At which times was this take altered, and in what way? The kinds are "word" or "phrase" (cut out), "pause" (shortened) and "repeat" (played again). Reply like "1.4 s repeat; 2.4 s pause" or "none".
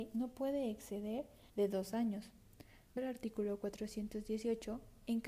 1.5 s pause; 3.0 s word